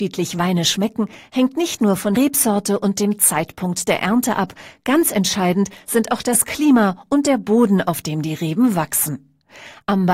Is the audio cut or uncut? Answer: cut